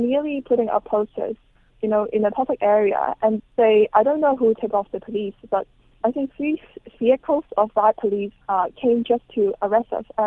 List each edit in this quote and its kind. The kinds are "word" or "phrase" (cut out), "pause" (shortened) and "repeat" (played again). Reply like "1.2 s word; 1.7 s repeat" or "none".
1.7 s word; 3.4 s word; 6.0 s word; 8.4 s pause